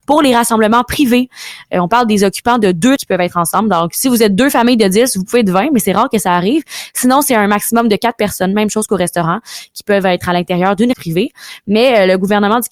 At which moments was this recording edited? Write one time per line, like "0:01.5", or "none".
0:03.0
0:10.9